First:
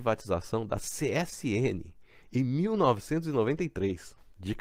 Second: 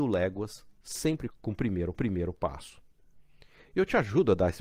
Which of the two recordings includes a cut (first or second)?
second